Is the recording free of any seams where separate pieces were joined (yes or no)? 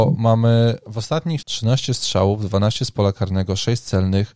no